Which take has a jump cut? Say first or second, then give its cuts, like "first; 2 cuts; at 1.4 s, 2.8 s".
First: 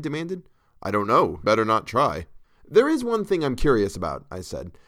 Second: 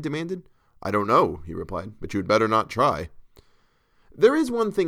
first; 2 cuts; at 1.4 s, 2.4 s